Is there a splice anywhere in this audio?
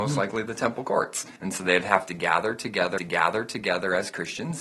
yes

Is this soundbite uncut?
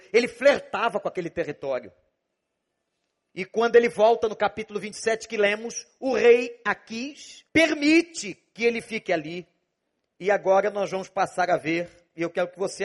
no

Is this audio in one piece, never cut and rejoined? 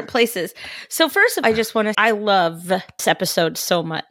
no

